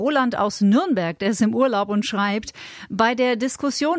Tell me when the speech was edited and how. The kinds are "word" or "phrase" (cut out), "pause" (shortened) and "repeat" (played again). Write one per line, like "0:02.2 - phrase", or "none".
none